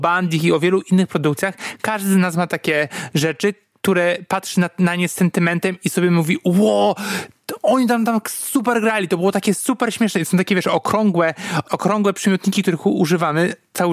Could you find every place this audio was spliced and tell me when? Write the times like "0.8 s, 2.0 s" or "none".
none